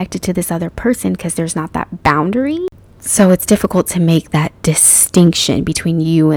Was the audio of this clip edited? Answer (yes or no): no